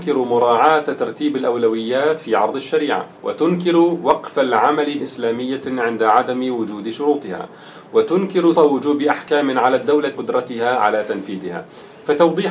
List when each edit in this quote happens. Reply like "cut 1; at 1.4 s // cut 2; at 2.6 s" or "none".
cut 1; at 3.2 s // cut 2; at 5.0 s // cut 3; at 8.5 s // cut 4; at 10.1 s